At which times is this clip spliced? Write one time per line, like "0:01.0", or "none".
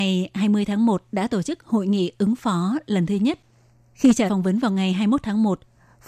0:04.3